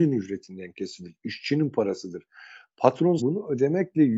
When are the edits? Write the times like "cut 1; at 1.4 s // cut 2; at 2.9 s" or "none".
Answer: cut 1; at 3.2 s